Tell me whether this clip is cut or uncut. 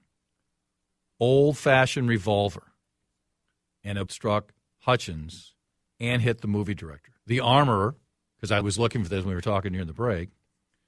cut